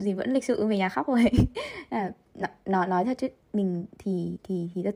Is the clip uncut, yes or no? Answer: yes